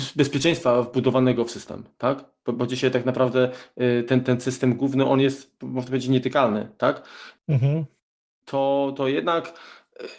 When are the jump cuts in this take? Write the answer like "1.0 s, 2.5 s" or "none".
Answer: none

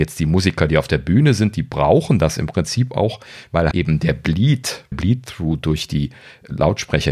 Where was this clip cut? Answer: 3.7 s, 4.9 s

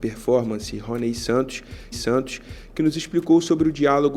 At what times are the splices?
1.9 s

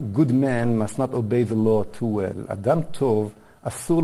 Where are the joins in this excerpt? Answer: none

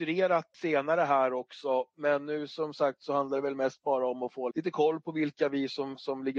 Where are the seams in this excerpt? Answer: 4.5 s

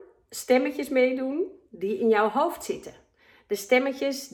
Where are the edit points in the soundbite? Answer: none

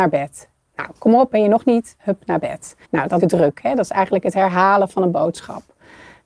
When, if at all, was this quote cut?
2.8 s, 3.2 s

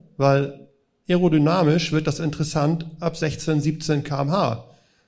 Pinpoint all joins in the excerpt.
none

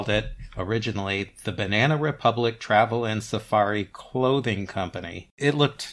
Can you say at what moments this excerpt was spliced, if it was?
none

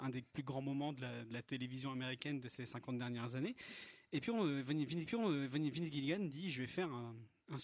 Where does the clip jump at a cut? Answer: 5.1 s

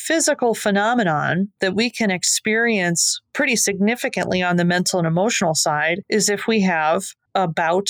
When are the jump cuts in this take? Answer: none

